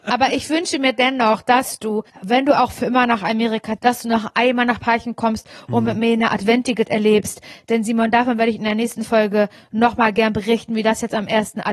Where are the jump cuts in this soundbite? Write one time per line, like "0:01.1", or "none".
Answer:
0:02.1
0:03.8
0:06.9